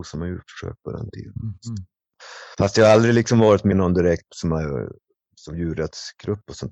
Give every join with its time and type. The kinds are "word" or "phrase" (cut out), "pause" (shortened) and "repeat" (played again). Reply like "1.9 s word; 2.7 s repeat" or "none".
3.7 s word; 4.3 s word

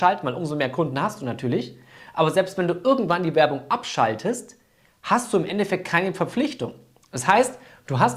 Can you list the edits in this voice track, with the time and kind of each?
none

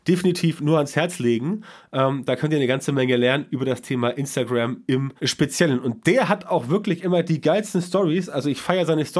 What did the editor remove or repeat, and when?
5.2 s pause

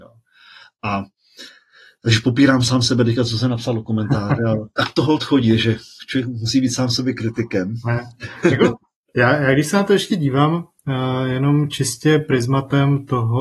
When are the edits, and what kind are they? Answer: none

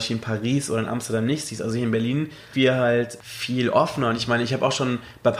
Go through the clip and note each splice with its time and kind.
2.5 s word

